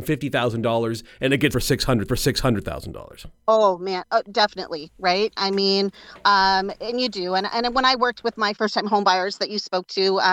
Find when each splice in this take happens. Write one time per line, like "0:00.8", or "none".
0:01.5
0:02.1
0:08.5